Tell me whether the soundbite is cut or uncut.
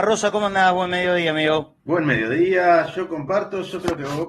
cut